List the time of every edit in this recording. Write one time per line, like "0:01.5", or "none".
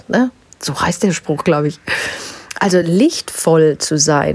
none